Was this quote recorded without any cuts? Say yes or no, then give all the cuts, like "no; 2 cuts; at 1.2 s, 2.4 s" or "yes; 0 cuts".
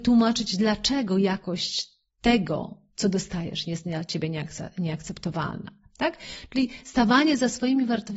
yes; 0 cuts